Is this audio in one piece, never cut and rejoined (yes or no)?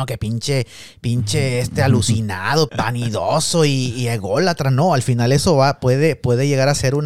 no